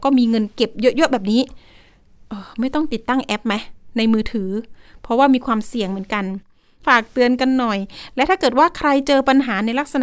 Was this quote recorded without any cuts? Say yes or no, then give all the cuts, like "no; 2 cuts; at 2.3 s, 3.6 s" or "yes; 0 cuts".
yes; 0 cuts